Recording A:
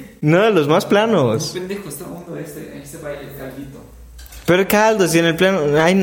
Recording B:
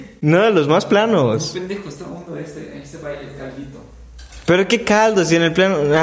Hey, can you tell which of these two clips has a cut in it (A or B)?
A